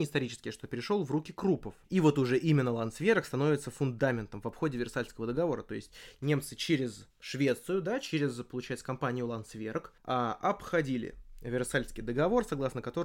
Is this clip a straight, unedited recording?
no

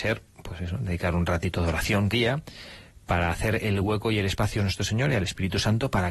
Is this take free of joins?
no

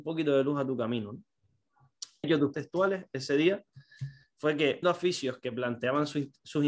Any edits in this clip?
yes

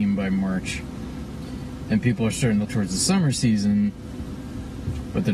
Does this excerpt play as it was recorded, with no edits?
no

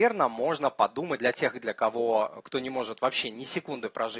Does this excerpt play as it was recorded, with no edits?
no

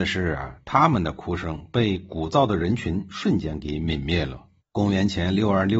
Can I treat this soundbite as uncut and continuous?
no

